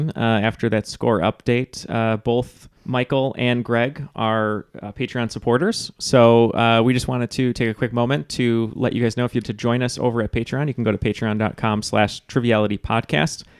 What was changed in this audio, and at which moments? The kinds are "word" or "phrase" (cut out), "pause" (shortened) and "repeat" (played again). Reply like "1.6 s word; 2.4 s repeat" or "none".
2.8 s pause; 9.4 s word